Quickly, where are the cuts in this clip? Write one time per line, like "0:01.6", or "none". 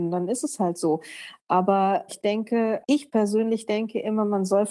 0:02.1
0:02.8

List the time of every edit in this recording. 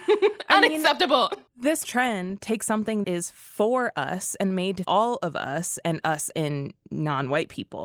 0:01.8
0:03.0
0:04.8
0:06.3

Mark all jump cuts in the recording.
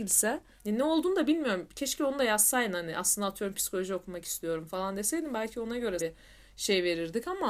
0:06.0

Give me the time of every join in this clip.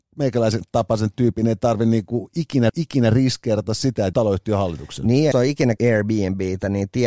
0:02.7
0:04.1
0:05.3
0:05.8

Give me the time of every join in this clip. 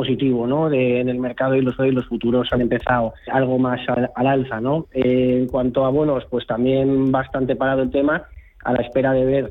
0:01.8
0:03.3

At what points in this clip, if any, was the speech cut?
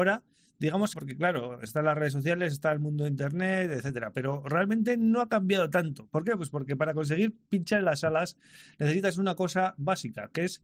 0:00.9

